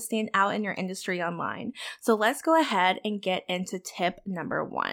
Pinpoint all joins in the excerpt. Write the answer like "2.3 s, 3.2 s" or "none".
none